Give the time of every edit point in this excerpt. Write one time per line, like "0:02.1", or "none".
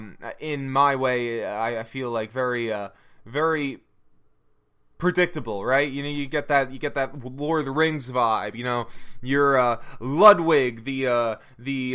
none